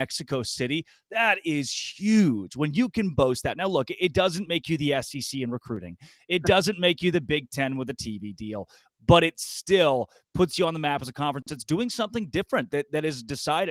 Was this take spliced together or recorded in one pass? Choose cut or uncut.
uncut